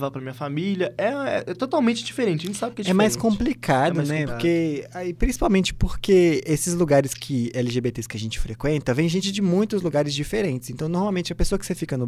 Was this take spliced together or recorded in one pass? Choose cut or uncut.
uncut